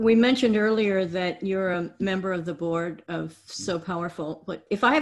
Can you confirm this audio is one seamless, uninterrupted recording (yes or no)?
yes